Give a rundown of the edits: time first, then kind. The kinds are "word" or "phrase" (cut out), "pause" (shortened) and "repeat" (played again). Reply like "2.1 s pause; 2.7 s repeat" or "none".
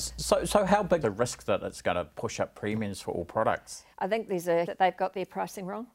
1.0 s word; 3.9 s pause; 4.7 s phrase